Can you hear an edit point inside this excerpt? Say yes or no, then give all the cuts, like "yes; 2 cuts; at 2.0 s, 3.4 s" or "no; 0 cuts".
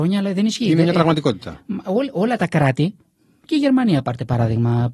no; 0 cuts